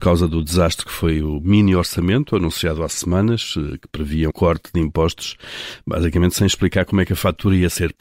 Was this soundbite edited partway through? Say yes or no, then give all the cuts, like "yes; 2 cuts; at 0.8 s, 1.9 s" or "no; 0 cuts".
yes; 1 cut; at 4.3 s